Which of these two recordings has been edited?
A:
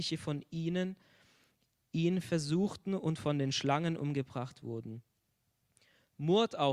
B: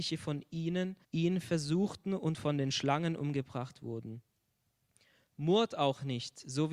B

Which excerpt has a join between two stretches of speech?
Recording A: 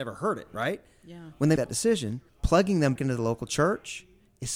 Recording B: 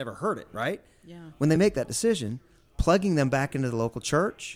A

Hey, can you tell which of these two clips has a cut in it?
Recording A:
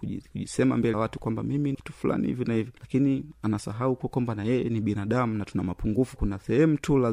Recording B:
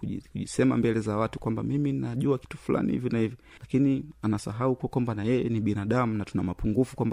A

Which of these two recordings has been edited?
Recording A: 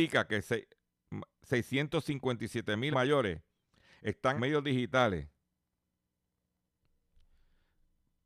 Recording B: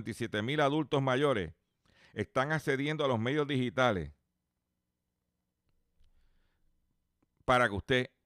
A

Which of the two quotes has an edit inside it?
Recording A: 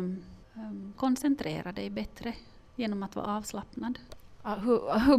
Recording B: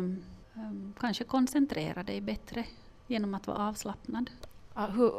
A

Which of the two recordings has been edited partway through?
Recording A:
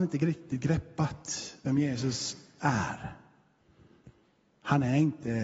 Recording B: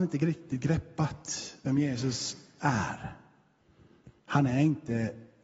B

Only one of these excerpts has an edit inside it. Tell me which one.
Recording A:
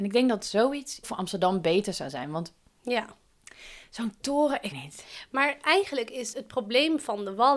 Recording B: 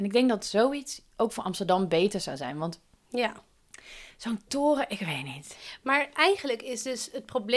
A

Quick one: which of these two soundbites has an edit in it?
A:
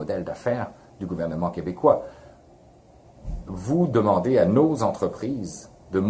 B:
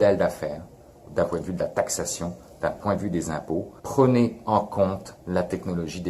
B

